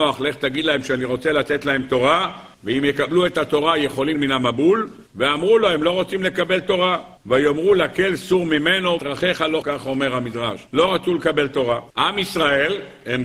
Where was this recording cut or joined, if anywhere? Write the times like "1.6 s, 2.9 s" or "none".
2.5 s, 4.1 s, 5.1 s, 7.2 s, 9.0 s, 9.6 s, 10.7 s, 11.9 s